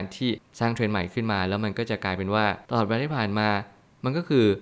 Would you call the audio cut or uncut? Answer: cut